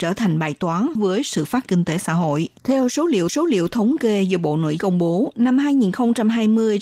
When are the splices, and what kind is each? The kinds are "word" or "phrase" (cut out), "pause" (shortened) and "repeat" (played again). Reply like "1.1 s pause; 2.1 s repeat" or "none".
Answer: 1.0 s phrase; 1.7 s word; 2.6 s pause; 3.3 s repeat; 4.8 s word